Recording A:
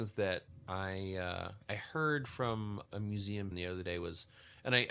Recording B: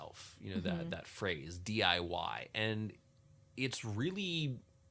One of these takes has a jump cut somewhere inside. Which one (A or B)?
A